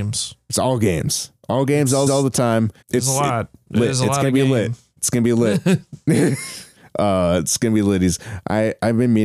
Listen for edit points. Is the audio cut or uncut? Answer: cut